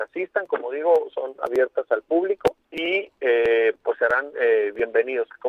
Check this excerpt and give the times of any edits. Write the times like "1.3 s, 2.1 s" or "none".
2.6 s